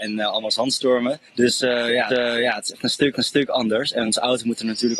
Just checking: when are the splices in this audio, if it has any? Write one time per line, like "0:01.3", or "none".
0:01.3
0:02.1
0:03.1
0:04.1